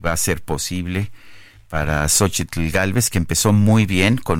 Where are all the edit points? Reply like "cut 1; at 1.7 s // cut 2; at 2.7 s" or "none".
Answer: none